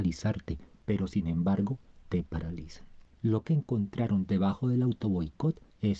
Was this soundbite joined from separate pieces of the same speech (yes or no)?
yes